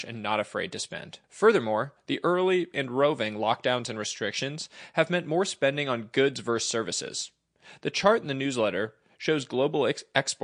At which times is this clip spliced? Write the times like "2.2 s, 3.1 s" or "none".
1.2 s